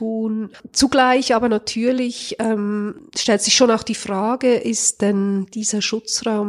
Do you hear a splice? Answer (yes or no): no